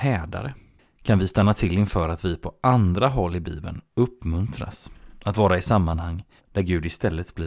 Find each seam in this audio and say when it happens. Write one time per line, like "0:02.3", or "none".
0:06.4

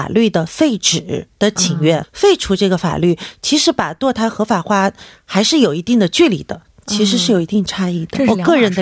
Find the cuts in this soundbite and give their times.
0:02.0

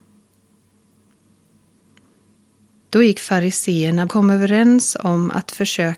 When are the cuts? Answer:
0:04.1

